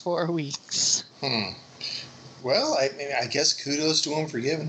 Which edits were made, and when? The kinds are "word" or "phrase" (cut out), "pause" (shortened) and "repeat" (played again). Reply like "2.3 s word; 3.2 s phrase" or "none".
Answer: 1.1 s pause